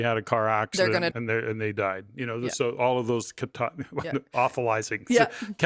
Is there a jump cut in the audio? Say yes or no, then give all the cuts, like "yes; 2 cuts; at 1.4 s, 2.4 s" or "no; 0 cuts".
yes; 1 cut; at 1.1 s